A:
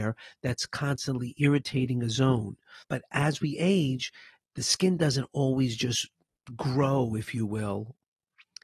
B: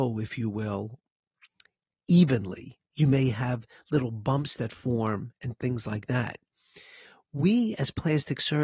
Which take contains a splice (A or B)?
A